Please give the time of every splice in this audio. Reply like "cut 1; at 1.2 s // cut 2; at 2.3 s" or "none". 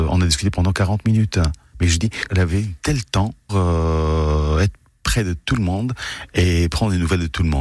cut 1; at 2.3 s // cut 2; at 3.5 s